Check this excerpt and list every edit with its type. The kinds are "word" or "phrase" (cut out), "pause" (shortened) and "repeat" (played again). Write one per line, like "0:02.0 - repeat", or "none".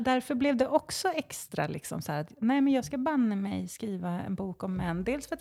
none

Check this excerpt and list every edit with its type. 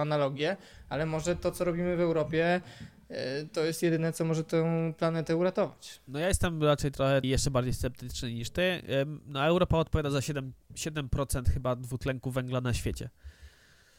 0:07.2 - word

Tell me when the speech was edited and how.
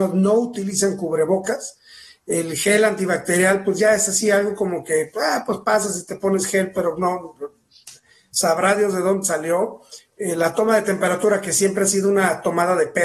none

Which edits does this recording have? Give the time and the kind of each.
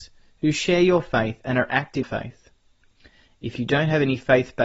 0:02.0 - phrase

